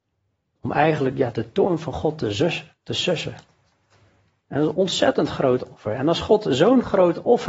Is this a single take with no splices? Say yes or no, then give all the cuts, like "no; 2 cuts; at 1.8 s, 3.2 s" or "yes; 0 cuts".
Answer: yes; 0 cuts